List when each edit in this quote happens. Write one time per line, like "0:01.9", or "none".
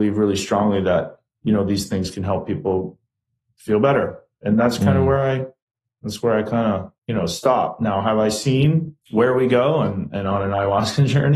0:07.0
0:09.0